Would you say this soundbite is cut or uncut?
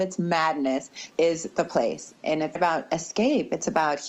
cut